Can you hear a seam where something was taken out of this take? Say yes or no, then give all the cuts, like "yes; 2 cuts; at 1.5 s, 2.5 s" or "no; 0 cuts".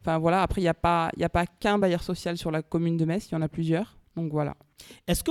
no; 0 cuts